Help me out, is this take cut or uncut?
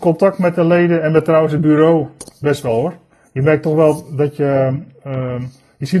uncut